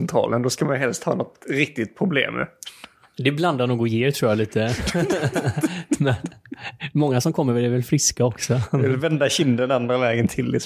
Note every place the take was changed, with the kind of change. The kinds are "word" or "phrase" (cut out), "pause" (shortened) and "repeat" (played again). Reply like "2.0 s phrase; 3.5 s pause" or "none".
none

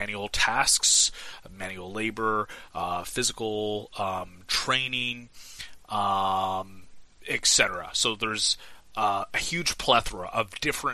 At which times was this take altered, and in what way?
none

